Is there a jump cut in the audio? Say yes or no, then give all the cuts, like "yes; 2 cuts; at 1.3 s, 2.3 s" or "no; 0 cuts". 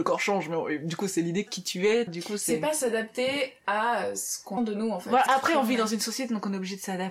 yes; 4 cuts; at 1.5 s, 2.1 s, 4.6 s, 5.3 s